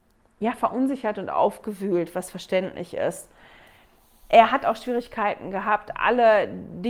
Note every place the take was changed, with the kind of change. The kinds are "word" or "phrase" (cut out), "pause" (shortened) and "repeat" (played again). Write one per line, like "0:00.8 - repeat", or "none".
none